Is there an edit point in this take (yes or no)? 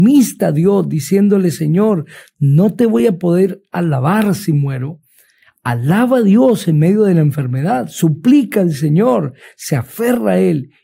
no